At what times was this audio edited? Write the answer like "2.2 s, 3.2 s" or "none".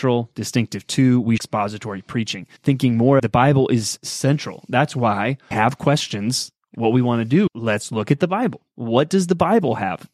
1.4 s, 2.6 s, 3.2 s, 5.5 s, 7.5 s